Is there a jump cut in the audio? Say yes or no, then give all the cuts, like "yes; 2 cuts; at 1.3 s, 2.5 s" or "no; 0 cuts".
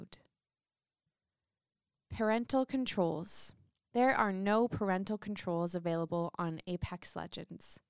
yes; 1 cut; at 3.7 s